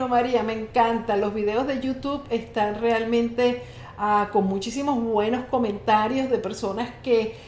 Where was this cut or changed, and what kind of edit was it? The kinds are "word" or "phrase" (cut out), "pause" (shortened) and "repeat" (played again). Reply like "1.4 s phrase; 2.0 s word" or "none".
none